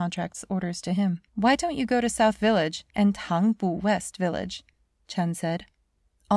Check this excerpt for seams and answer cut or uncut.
cut